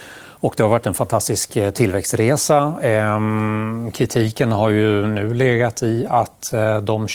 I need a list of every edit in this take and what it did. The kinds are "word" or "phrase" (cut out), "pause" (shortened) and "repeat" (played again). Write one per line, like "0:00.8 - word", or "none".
none